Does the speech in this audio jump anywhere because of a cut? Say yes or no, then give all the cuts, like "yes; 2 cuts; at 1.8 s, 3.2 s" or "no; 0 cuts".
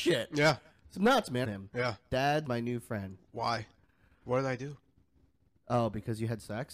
yes; 3 cuts; at 1.0 s, 1.4 s, 2.4 s